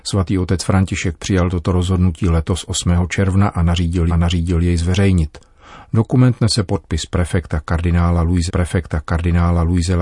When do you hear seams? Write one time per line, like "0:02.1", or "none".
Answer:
0:04.1
0:08.5